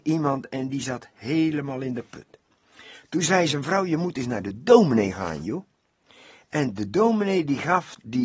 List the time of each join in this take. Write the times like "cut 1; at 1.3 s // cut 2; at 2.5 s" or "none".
none